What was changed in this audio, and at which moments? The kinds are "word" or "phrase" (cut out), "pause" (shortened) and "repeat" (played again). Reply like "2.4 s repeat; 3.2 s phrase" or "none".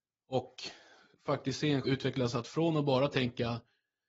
1.8 s word